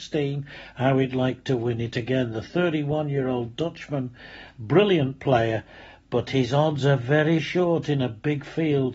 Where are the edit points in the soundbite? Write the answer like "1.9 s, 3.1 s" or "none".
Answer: 7.4 s